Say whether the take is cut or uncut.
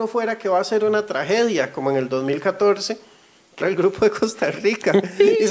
cut